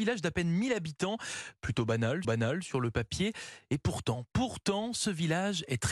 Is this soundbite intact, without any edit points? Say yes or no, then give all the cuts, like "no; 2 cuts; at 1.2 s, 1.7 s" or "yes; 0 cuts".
no; 1 cut; at 2.2 s